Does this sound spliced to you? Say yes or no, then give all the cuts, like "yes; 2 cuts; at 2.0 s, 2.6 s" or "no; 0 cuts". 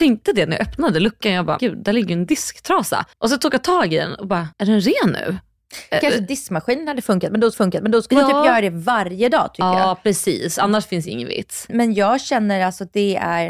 yes; 5 cuts; at 1.6 s, 3.1 s, 4.5 s, 7.5 s, 11.7 s